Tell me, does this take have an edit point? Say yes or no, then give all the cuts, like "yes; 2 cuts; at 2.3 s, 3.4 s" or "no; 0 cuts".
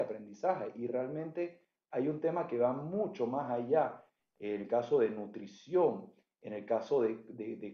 no; 0 cuts